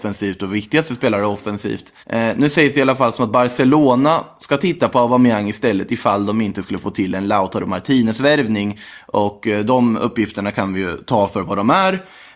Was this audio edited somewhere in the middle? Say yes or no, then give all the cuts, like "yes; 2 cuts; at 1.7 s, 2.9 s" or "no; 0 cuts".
yes; 1 cut; at 2.0 s